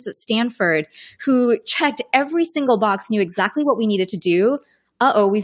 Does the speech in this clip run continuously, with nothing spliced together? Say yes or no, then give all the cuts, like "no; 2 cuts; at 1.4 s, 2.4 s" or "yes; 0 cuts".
yes; 0 cuts